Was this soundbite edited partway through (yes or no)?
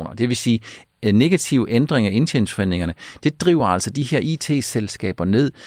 no